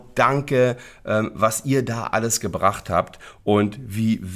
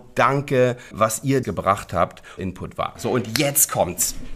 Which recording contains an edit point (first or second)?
second